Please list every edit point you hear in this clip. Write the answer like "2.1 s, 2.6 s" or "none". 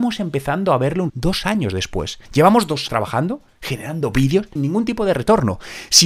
1.1 s, 2.3 s, 2.9 s, 4.6 s

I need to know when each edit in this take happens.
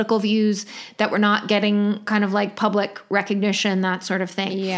none

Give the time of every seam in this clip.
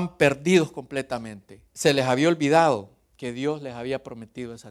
1.7 s

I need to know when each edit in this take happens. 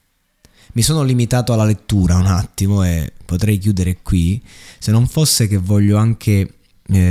none

